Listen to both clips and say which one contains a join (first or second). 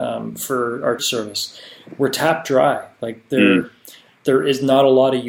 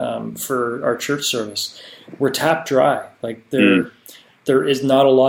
first